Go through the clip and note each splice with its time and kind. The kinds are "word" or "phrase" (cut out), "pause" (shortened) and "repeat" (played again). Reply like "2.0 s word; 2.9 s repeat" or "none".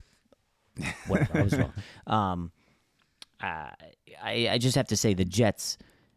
none